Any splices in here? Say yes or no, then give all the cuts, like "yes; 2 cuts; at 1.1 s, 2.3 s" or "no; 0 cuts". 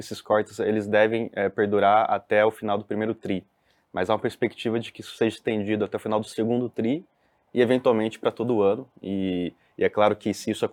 no; 0 cuts